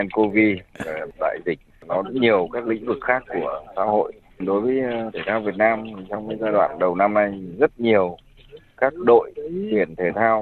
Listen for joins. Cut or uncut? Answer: cut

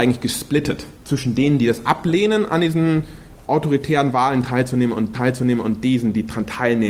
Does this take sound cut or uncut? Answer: cut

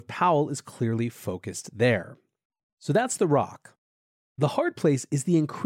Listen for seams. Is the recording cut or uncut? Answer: uncut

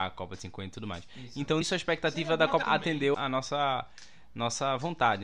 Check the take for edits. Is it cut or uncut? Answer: cut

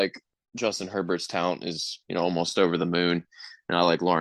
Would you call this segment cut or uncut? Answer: uncut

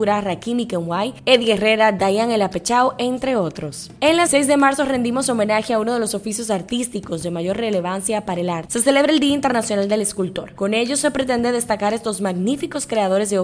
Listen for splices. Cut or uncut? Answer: cut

